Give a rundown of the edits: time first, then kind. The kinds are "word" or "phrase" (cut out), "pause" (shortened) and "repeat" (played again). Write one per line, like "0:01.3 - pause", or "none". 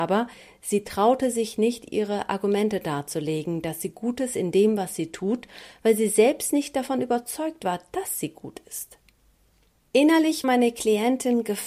0:10.4 - word

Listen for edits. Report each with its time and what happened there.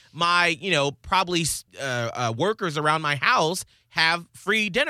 0:01.7 - pause

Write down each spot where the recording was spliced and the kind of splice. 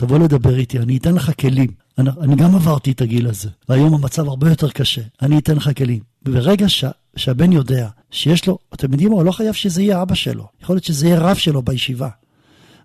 0:01.8 - pause
0:03.6 - pause
0:05.1 - pause
0:08.0 - pause
0:10.5 - pause

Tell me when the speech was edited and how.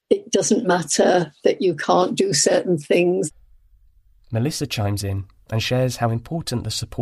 none

